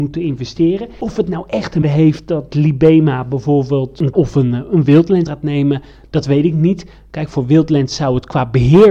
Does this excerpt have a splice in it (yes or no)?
yes